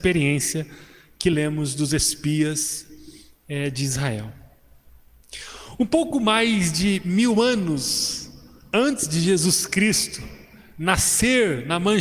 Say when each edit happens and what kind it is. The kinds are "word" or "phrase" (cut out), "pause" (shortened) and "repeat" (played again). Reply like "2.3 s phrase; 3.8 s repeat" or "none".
none